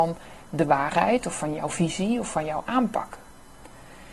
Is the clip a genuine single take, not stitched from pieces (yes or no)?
yes